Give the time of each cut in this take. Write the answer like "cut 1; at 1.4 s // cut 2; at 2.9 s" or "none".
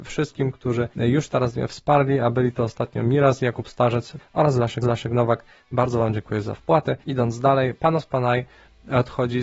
cut 1; at 0.9 s // cut 2; at 4.2 s // cut 3; at 4.8 s // cut 4; at 7.0 s

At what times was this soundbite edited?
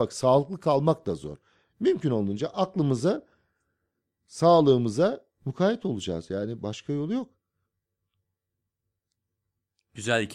none

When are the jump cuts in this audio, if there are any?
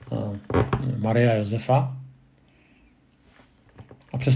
none

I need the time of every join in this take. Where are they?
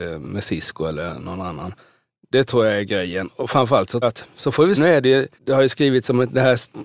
cut 1; at 4.0 s // cut 2; at 4.8 s // cut 3; at 5.4 s

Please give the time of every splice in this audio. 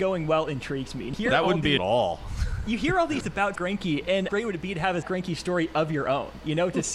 cut 1; at 1.1 s // cut 2; at 1.8 s // cut 3; at 3.2 s // cut 4; at 3.6 s // cut 5; at 4.3 s // cut 6; at 5.0 s

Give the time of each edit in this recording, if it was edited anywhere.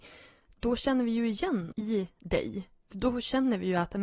cut 1; at 1.7 s

